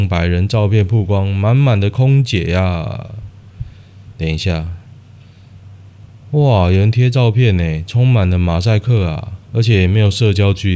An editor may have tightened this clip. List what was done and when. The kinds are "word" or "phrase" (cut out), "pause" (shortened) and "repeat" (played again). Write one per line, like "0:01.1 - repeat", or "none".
0:09.4 - pause